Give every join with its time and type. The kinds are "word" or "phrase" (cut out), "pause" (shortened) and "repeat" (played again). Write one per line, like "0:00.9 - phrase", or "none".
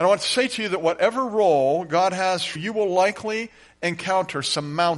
0:02.6 - word